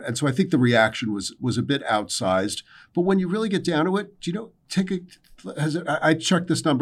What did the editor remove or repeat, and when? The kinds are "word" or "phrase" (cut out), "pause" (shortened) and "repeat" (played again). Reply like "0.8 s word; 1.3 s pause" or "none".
none